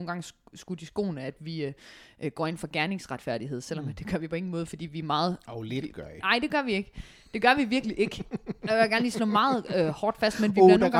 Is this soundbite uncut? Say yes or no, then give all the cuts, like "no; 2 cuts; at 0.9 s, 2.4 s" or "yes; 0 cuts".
yes; 0 cuts